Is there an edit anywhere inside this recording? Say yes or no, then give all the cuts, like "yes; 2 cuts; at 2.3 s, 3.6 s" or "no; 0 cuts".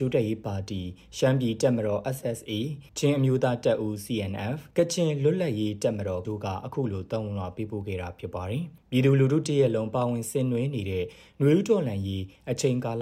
yes; 4 cuts; at 2.2 s, 2.9 s, 4.7 s, 6.2 s